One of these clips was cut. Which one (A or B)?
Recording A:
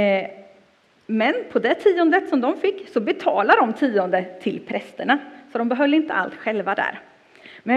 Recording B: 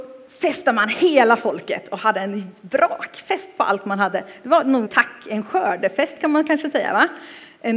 B